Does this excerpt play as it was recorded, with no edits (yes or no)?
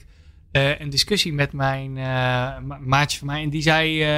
yes